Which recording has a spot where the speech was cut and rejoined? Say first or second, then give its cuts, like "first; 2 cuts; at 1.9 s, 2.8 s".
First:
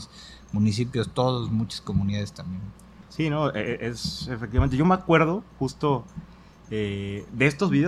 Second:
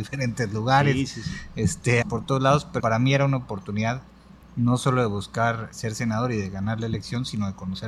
second; 3 cuts; at 2.0 s, 2.8 s, 5.7 s